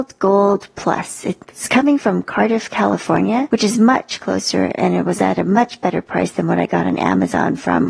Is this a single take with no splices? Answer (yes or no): no